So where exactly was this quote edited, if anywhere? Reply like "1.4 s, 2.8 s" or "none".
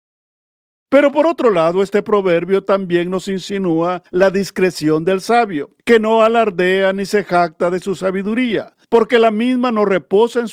4.1 s, 5.8 s, 8.8 s